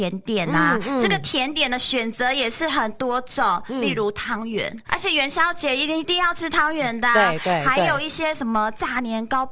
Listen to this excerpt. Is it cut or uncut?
cut